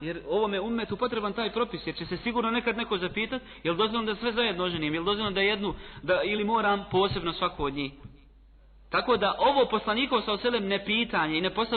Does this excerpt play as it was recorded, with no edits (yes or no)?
yes